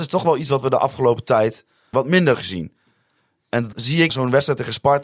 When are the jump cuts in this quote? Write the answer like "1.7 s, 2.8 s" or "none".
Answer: 1.9 s, 2.3 s, 3.7 s, 4.1 s